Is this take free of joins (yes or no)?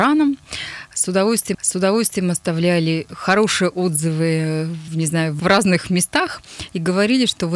no